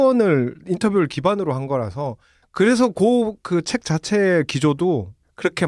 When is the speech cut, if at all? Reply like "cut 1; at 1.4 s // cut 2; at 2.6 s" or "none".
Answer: none